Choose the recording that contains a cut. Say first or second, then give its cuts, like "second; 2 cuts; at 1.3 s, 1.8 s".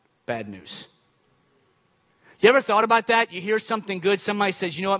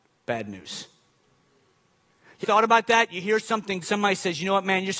second; 2 cuts; at 2.4 s, 3.8 s